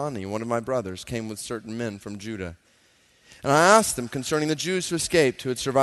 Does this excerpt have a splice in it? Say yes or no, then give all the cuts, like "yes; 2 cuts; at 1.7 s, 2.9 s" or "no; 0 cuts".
no; 0 cuts